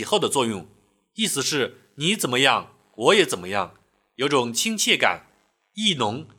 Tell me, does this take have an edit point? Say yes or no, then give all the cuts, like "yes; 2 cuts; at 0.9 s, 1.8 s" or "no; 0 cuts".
no; 0 cuts